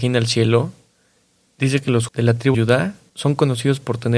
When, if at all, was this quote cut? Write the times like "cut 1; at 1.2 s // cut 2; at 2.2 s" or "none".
cut 1; at 2.1 s // cut 2; at 2.5 s